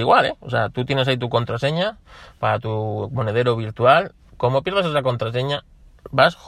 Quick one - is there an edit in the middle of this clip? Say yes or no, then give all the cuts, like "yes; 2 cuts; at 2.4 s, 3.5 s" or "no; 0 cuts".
no; 0 cuts